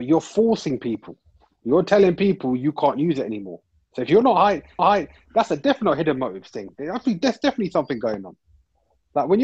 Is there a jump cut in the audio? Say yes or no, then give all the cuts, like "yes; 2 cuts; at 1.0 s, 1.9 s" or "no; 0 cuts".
yes; 1 cut; at 4.8 s